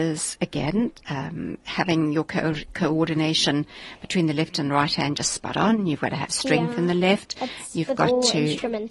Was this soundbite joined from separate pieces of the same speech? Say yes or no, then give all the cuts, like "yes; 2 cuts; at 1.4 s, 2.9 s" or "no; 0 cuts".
no; 0 cuts